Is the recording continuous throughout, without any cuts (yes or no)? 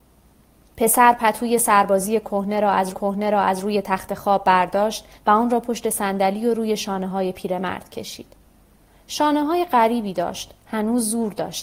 no